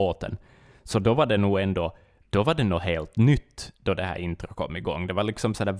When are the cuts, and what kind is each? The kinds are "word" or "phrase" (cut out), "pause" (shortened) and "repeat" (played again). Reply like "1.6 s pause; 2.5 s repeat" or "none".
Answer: none